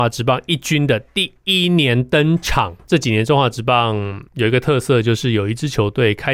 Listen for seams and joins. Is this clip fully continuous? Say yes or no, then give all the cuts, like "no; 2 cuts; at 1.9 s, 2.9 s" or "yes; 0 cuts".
no; 1 cut; at 4.3 s